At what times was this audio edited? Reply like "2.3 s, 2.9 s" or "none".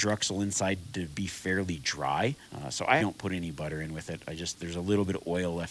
2.4 s, 3.0 s